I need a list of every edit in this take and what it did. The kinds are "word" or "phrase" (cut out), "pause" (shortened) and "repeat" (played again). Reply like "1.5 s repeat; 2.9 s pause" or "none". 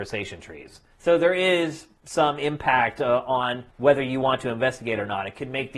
0.9 s pause; 2.0 s pause; 3.7 s pause